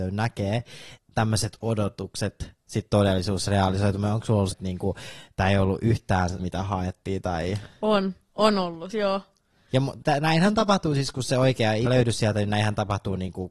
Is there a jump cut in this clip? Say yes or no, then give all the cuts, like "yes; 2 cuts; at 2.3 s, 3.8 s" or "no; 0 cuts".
yes; 6 cuts; at 1.0 s, 4.5 s, 6.4 s, 8.9 s, 10.0 s, 11.9 s